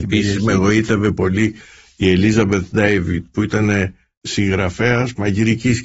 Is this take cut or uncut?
uncut